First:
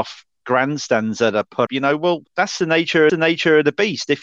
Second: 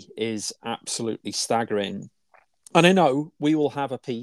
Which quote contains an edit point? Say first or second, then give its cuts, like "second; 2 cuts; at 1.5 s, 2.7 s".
first; 3 cuts; at 1.7 s, 2.3 s, 3.1 s